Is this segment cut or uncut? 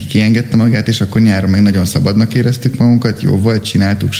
uncut